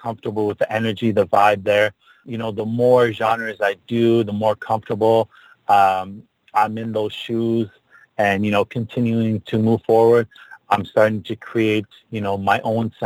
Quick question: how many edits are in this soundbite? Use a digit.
0